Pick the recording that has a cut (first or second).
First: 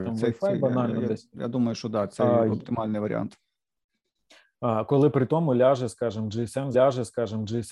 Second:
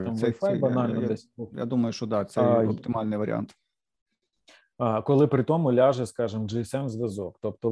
first